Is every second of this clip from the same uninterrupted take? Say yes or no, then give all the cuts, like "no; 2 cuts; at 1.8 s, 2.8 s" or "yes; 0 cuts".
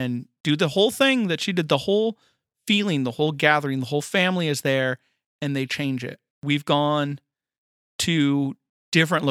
yes; 0 cuts